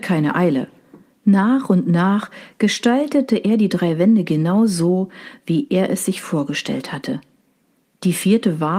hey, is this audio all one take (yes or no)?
yes